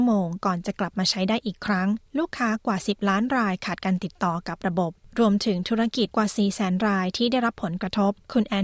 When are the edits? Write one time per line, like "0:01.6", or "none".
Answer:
0:02.1